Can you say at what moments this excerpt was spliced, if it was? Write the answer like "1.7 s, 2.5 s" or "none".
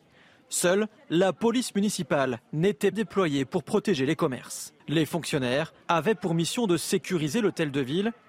2.9 s, 4.8 s, 5.8 s